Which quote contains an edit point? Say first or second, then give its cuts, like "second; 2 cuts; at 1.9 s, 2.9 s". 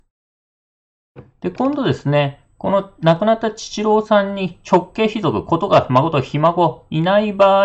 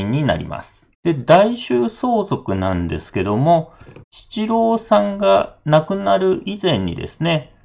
second; 2 cuts; at 0.9 s, 4.0 s